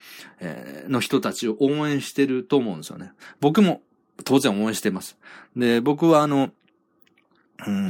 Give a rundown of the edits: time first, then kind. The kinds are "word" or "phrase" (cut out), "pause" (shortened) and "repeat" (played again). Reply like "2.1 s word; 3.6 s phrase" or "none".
none